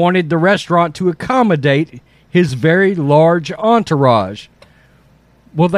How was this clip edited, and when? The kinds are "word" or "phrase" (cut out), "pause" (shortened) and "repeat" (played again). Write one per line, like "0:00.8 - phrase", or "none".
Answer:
none